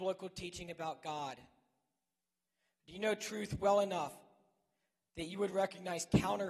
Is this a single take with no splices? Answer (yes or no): yes